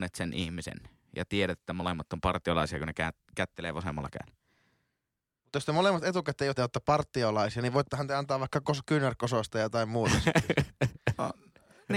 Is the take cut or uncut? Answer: cut